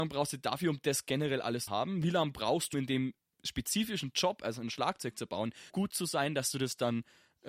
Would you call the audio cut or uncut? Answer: cut